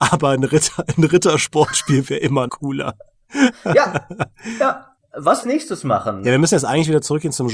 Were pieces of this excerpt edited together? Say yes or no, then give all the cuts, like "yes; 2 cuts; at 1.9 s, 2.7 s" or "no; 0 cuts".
yes; 2 cuts; at 2.5 s, 5.4 s